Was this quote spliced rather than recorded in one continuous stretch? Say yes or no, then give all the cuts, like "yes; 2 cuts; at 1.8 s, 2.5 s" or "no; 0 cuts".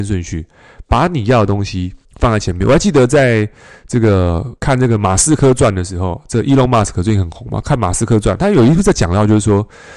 yes; 2 cuts; at 2.0 s, 4.6 s